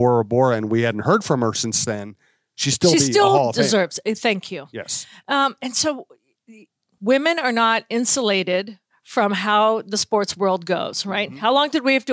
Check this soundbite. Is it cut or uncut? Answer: uncut